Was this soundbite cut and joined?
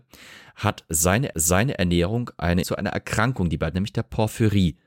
yes; 3 cuts; at 1.3 s, 2.6 s, 3.7 s

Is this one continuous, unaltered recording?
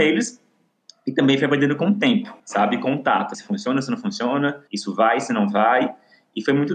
no; 3 cuts; at 2.4 s, 3.3 s, 4.7 s

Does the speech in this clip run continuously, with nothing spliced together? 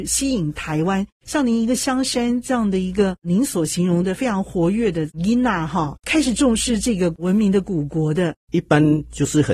no; 2 cuts; at 6.0 s, 8.4 s

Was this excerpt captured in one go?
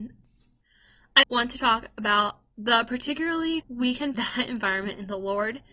no; 3 cuts; at 1.2 s, 3.6 s, 4.1 s

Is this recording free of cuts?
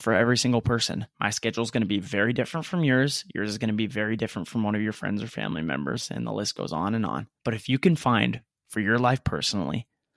no; 2 cuts; at 1.1 s, 7.4 s

